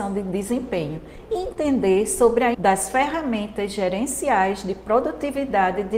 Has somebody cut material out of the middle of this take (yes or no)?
yes